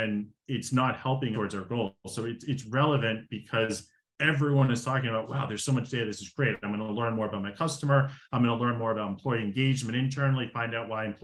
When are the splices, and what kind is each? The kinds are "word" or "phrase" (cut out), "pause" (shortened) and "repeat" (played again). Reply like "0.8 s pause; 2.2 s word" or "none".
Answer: 1.3 s phrase